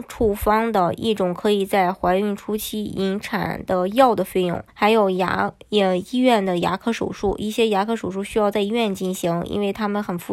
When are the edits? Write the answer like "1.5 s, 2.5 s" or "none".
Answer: 4.7 s